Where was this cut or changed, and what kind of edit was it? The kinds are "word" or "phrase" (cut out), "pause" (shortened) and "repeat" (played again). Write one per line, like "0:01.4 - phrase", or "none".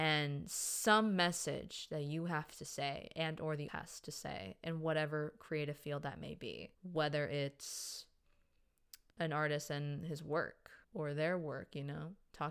0:03.7 - word
0:06.7 - pause
0:09.1 - pause
0:10.8 - pause